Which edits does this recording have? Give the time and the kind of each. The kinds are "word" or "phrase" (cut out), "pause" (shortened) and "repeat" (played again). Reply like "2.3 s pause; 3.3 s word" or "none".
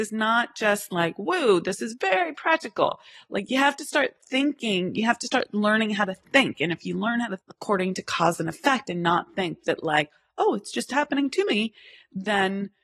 7.4 s word